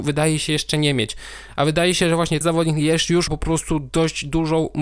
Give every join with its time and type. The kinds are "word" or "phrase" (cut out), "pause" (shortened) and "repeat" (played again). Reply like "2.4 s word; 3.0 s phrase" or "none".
2.4 s word; 3.3 s word

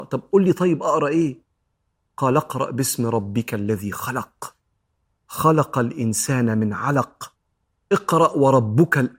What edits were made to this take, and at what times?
none

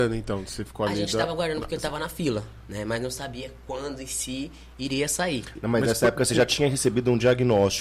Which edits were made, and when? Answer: none

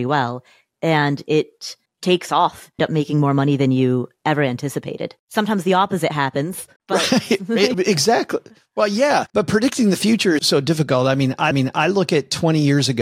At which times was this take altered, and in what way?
1.9 s pause; 2.8 s phrase; 5.2 s pause; 6.8 s pause; 7.7 s word; 9.3 s pause; 10.4 s word; 11.5 s repeat

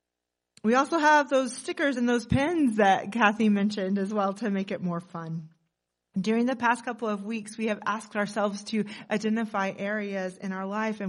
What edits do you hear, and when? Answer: none

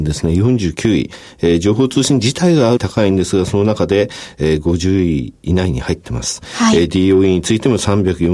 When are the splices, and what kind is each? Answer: 2.8 s word

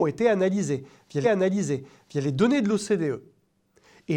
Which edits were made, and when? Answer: 1.2 s repeat

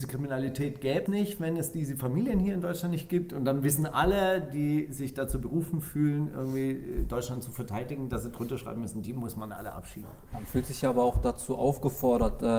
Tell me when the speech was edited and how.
1.1 s word

